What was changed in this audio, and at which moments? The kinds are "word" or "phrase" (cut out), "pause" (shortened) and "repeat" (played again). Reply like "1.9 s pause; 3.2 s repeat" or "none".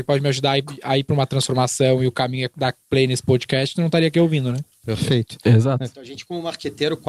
none